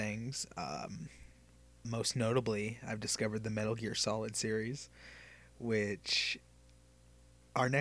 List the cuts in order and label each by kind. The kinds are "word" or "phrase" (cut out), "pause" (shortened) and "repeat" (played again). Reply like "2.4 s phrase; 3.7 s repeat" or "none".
1.8 s word